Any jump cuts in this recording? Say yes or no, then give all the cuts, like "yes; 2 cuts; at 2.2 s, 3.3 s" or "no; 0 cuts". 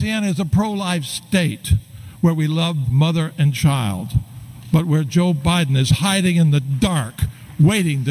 yes; 1 cut; at 2.8 s